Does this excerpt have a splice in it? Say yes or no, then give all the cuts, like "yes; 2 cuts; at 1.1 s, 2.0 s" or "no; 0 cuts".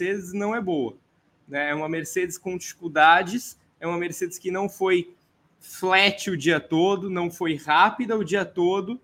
no; 0 cuts